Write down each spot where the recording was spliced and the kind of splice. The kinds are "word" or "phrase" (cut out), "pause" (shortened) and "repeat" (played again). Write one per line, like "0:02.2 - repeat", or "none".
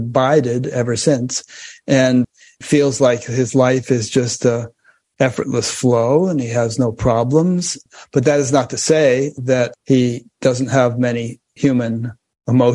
none